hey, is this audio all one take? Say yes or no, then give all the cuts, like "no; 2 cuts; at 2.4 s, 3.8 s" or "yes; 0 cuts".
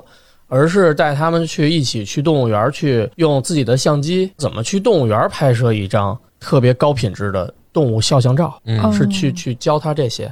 no; 3 cuts; at 3.1 s, 4.3 s, 8.6 s